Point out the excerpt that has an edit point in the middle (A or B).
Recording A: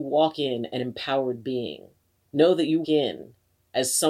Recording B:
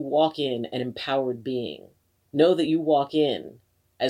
A